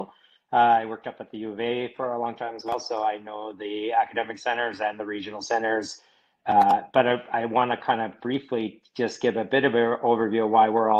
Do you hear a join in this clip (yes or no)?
no